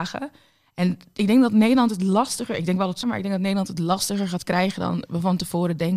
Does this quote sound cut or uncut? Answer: cut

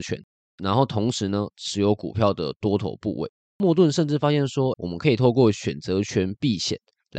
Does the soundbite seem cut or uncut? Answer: cut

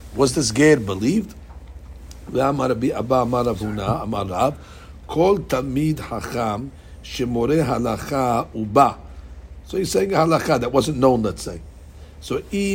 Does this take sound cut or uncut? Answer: uncut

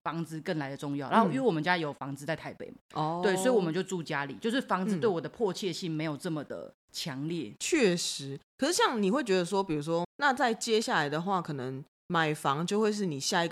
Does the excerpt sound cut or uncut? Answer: cut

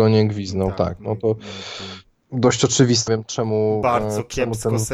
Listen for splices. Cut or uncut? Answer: cut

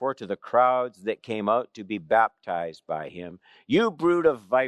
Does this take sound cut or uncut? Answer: uncut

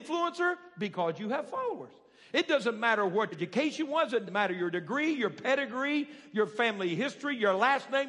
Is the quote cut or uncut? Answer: cut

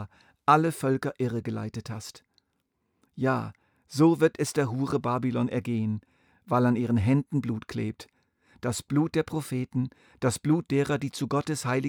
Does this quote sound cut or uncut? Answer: uncut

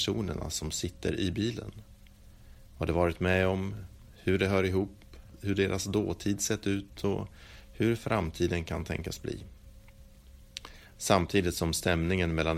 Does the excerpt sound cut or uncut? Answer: uncut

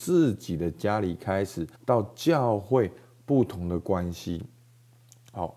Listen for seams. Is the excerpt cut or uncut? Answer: cut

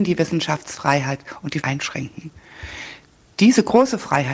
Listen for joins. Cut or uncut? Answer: cut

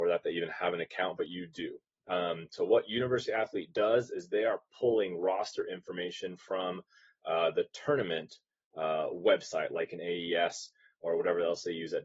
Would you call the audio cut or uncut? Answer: uncut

